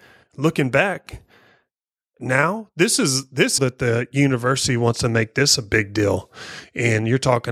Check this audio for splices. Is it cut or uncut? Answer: cut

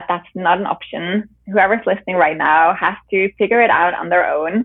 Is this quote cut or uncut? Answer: uncut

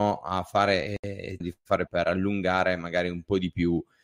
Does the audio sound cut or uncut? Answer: cut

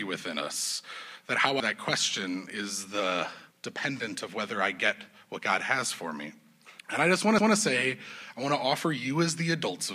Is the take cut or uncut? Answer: cut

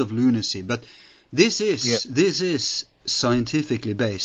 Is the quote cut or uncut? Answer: uncut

